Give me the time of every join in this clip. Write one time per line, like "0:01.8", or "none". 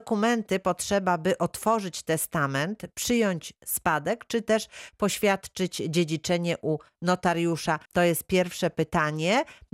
0:07.9